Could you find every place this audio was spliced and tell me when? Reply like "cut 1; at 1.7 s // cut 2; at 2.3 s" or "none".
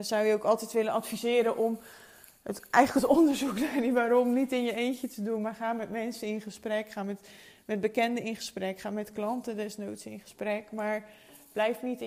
none